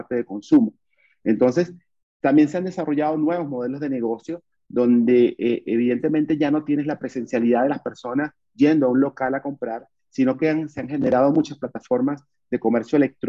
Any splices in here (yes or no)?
no